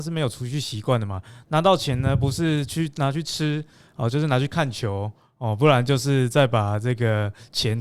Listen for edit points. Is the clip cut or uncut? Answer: uncut